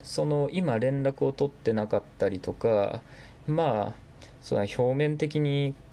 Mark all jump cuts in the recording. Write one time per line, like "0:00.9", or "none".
0:03.4

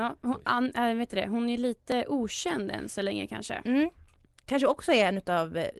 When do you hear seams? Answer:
none

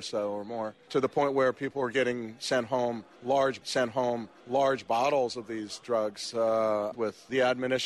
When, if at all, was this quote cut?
0:03.6

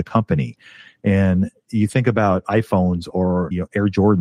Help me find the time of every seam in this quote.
none

